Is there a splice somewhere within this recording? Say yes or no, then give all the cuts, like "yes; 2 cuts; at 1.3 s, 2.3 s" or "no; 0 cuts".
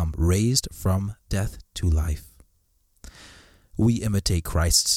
yes; 1 cut; at 1.2 s